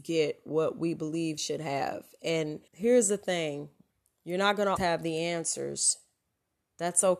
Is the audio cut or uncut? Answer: cut